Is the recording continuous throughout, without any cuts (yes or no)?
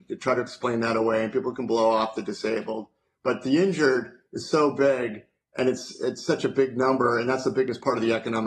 yes